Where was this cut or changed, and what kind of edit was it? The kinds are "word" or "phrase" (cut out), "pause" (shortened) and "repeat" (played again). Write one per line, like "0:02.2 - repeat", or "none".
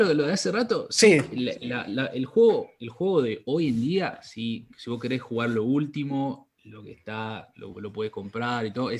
none